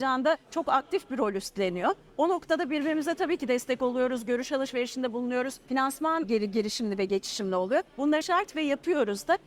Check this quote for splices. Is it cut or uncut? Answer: cut